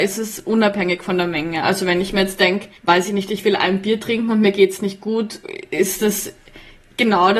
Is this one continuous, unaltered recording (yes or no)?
no